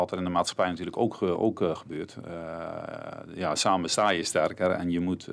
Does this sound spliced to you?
no; 0 cuts

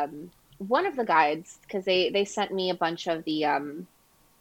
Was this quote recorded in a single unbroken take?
yes; 0 cuts

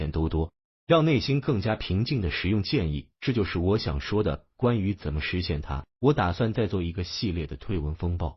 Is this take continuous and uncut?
no; 2 cuts; at 3.1 s, 5.9 s

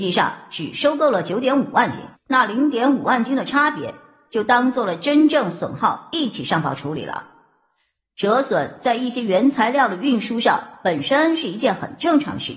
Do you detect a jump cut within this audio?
yes; 1 cut; at 2.1 s

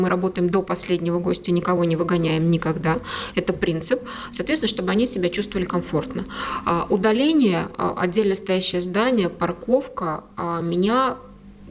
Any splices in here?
no; 0 cuts

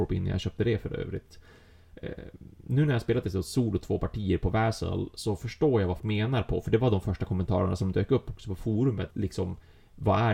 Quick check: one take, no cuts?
no; 2 cuts; at 6.0 s, 9.1 s

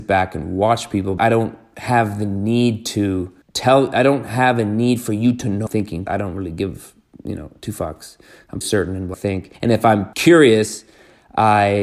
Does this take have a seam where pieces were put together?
yes; 8 cuts; at 1.2 s, 3.4 s, 5.7 s, 6.1 s, 8.6 s, 9.1 s, 9.5 s, 10.1 s

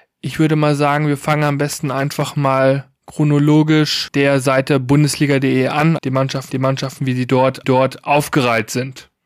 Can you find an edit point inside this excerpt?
yes; 3 cuts; at 6.0 s, 6.5 s, 7.6 s

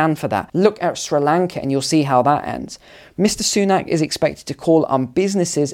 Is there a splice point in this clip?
no; 0 cuts

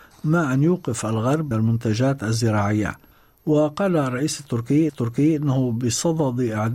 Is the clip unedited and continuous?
no; 3 cuts; at 1.5 s, 3.1 s, 4.9 s

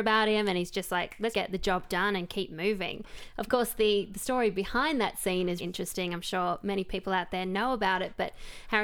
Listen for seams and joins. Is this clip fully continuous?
no; 2 cuts; at 1.3 s, 5.6 s

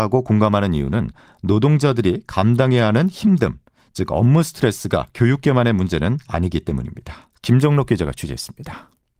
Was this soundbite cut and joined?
no; 0 cuts

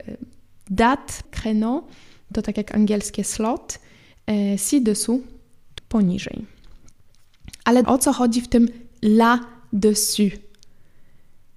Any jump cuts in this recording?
yes; 3 cuts; at 1.2 s, 5.8 s, 7.8 s

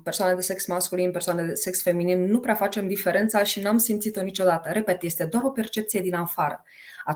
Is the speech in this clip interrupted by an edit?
no; 0 cuts

